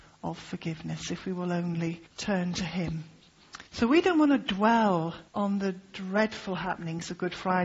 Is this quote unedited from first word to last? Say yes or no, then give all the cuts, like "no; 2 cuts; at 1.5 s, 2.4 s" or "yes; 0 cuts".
no; 3 cuts; at 2.1 s, 3.7 s, 5.3 s